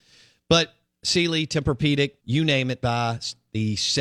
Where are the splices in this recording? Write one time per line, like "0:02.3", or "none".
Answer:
0:02.2
0:02.8

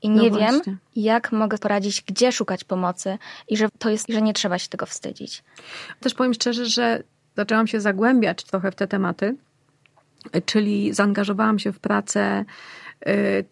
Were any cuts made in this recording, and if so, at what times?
0:01.6
0:03.7
0:04.0
0:06.0

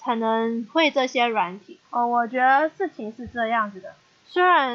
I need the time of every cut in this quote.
0:01.8

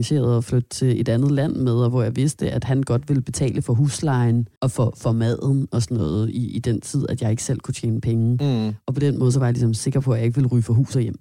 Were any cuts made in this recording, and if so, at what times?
0:04.6

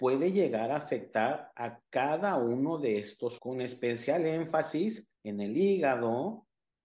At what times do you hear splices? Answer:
0:03.4
0:05.2

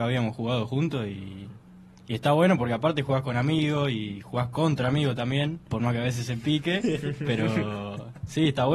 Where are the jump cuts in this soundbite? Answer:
0:05.7

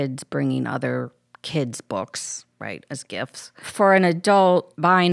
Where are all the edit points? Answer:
none

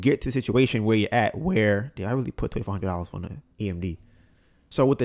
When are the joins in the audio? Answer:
0:03.5

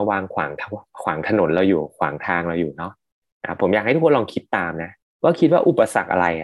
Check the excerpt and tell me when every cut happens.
0:05.0

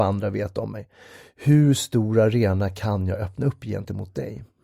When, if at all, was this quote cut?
none

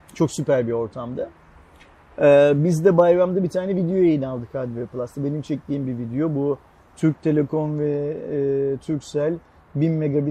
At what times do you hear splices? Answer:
none

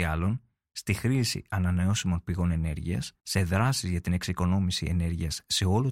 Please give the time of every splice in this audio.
0:03.2

